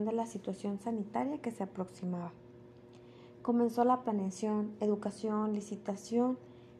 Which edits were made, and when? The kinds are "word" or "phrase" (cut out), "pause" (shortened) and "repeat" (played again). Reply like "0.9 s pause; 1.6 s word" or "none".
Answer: none